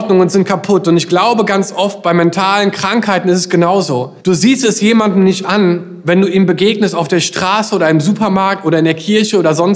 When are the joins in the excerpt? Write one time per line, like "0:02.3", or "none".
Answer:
0:04.2